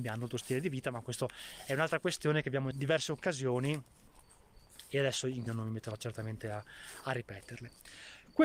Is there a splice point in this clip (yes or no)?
yes